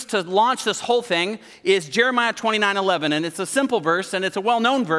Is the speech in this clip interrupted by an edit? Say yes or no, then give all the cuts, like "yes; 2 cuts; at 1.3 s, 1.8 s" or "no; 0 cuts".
no; 0 cuts